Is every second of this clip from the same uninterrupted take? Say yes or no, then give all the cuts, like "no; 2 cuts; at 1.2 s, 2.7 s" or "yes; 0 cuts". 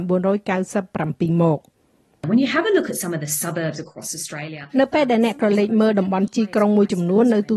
no; 1 cut; at 4.7 s